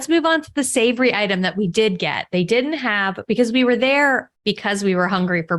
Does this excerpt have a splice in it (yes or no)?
yes